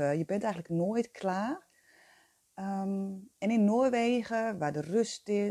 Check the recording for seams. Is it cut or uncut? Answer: uncut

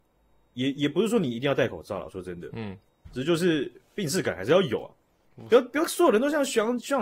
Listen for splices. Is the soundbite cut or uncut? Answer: cut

